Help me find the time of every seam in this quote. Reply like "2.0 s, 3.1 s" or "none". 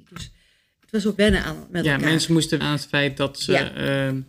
1.2 s, 2.6 s

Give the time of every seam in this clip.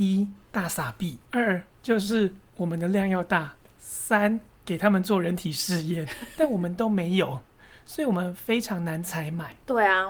none

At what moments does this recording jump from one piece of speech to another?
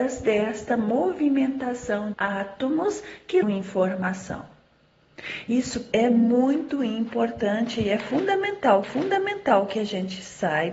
2.1 s, 3.4 s, 5.9 s, 8.8 s

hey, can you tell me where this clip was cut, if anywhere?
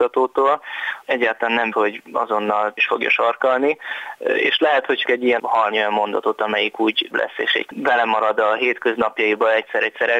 1.0 s, 1.7 s, 2.8 s, 5.0 s, 5.4 s, 5.7 s, 7.1 s, 7.7 s

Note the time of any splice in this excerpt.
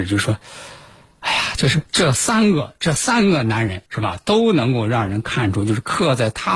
1.9 s, 3.9 s

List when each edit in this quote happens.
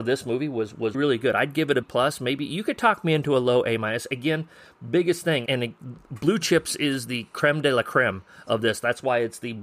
0.9 s, 1.8 s, 5.5 s

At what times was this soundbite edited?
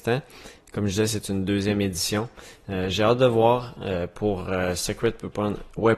none

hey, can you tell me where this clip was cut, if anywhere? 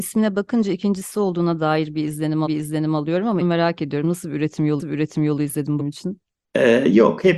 2.5 s, 3.4 s, 4.8 s, 5.8 s

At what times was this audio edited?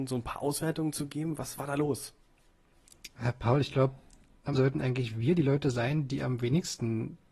1.6 s, 4.5 s

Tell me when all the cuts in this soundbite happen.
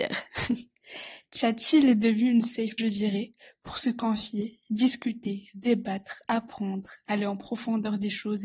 2.8 s

